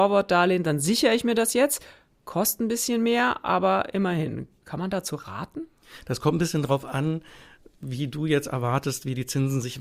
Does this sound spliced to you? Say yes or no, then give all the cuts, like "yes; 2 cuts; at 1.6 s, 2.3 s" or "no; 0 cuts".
no; 0 cuts